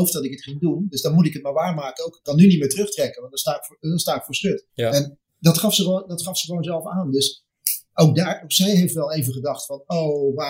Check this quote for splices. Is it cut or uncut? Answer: cut